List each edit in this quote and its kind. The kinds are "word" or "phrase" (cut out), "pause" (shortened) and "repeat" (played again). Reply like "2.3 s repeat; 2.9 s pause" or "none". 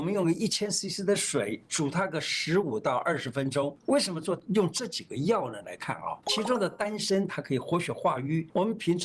none